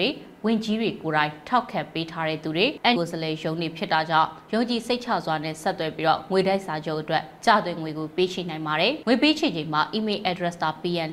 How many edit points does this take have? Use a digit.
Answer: 1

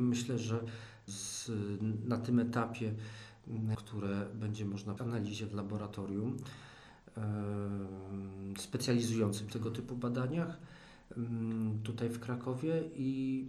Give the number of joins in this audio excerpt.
4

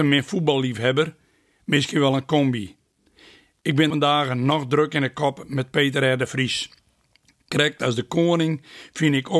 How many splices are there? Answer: 1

